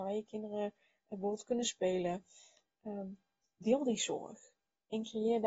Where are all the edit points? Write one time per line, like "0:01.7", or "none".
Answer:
none